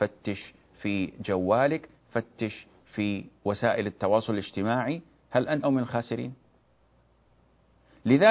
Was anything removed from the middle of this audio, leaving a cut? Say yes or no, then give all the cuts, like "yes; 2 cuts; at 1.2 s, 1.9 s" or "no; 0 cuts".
yes; 1 cut; at 5.6 s